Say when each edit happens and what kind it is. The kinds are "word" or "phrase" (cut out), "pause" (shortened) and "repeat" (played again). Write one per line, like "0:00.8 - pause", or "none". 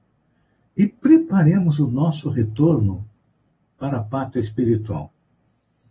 none